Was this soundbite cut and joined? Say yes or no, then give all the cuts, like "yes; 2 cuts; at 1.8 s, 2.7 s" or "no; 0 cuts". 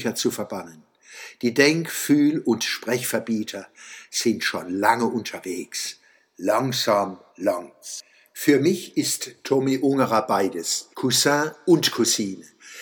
yes; 2 cuts; at 7.3 s, 10.9 s